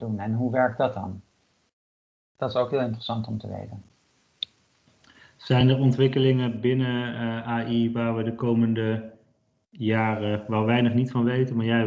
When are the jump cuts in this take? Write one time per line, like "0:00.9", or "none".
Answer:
none